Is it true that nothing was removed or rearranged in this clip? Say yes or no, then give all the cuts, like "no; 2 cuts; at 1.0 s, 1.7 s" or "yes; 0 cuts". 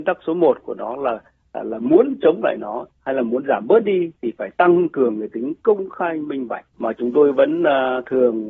no; 2 cuts; at 2.9 s, 6.7 s